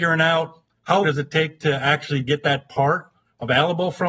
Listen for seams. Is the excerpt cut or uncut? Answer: cut